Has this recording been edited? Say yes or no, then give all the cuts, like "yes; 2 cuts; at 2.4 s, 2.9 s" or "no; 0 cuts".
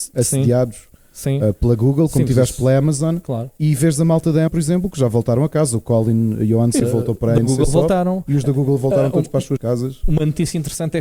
yes; 3 cuts; at 4.5 s, 6.8 s, 9.6 s